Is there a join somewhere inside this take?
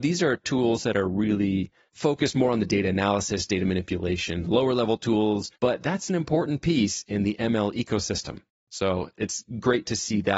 yes; 1 cut; at 5.6 s

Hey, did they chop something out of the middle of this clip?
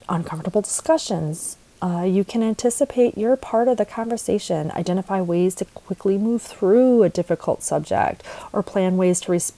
no; 0 cuts

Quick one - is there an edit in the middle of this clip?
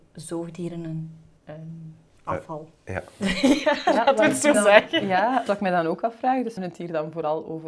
yes; 4 cuts; at 2.1 s, 4.5 s, 5.5 s, 6.6 s

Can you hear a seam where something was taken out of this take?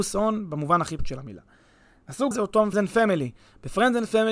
yes; 3 cuts; at 1.0 s, 2.3 s, 2.7 s

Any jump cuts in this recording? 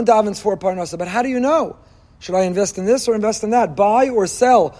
no; 0 cuts

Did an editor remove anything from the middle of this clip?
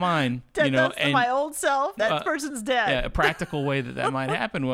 yes; 1 cut; at 2.0 s

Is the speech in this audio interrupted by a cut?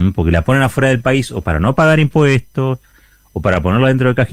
no; 0 cuts

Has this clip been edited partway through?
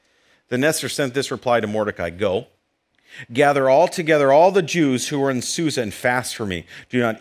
no; 0 cuts

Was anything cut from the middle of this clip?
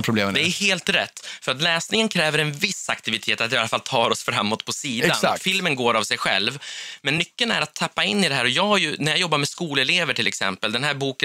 no; 0 cuts

